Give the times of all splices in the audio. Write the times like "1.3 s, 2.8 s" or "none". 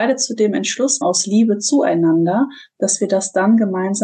1.0 s